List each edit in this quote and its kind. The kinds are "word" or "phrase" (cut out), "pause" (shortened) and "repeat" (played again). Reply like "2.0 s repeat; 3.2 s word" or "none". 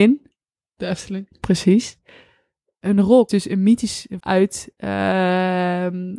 3.3 s word; 4.2 s word